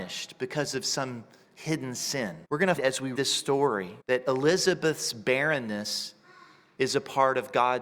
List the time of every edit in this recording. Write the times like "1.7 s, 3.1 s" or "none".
2.4 s, 2.8 s, 3.2 s, 4.0 s